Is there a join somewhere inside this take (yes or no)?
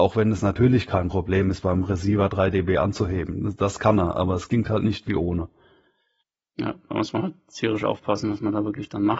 no